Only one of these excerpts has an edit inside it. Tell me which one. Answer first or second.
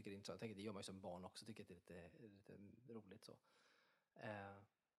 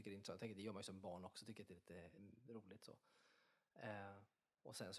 second